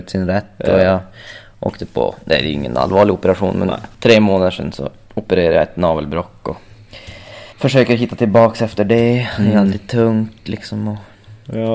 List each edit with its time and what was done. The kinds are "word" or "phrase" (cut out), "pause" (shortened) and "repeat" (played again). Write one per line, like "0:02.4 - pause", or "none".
0:03.9 - pause
0:07.5 - pause